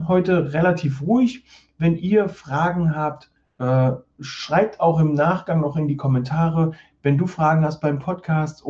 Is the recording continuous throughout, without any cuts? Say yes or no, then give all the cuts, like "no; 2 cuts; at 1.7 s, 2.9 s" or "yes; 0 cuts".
yes; 0 cuts